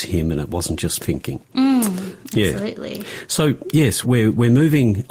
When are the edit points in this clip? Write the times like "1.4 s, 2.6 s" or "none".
1.0 s, 4.0 s

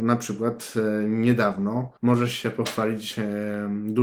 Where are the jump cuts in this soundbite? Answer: 2.0 s

